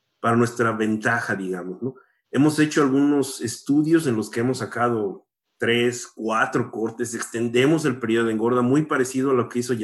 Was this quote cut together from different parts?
no; 0 cuts

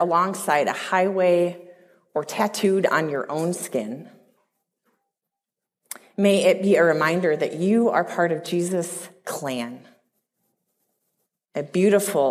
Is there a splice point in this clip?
no; 0 cuts

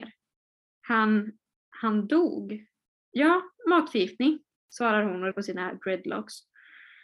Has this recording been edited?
yes; 3 cuts; at 2.9 s, 4.6 s, 5.3 s

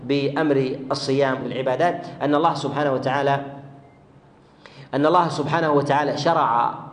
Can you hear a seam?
yes; 1 cut; at 1.4 s

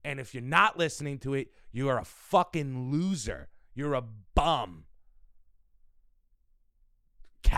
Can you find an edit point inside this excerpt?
no; 0 cuts

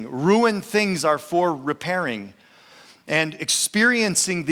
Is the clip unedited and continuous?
yes; 0 cuts

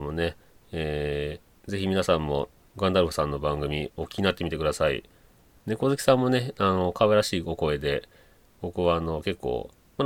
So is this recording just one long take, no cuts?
yes; 0 cuts

